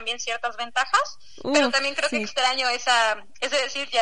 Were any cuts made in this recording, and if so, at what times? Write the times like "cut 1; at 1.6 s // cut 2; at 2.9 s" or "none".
none